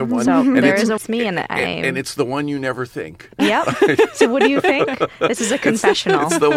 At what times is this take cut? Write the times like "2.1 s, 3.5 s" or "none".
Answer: 1.0 s